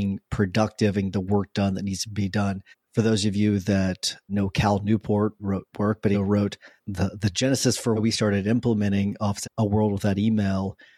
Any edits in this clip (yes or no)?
yes